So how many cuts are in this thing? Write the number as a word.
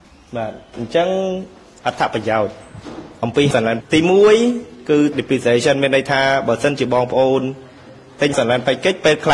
four